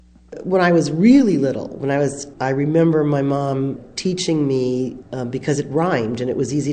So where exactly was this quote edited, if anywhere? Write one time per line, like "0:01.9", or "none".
0:02.3
0:05.0